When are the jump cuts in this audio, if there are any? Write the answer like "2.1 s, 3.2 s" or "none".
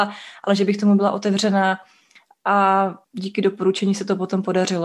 3.0 s